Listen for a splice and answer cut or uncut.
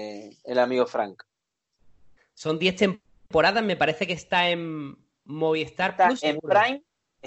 uncut